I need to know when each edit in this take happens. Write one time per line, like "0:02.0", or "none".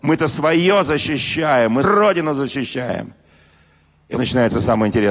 0:01.8
0:04.1